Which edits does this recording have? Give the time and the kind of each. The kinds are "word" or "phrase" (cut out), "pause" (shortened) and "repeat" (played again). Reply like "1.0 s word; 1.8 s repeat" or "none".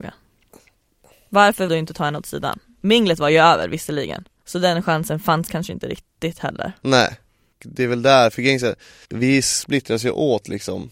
1.7 s word; 4.4 s word; 7.5 s word; 9.0 s word